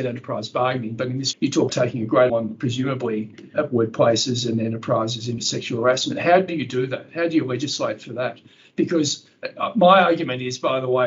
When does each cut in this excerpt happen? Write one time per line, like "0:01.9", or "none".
0:01.3
0:01.7
0:02.3
0:03.5
0:05.4
0:06.5